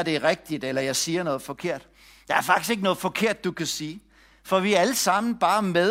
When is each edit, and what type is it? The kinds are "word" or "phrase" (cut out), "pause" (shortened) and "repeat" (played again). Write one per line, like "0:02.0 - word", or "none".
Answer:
none